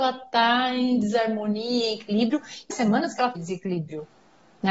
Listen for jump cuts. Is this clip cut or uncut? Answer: cut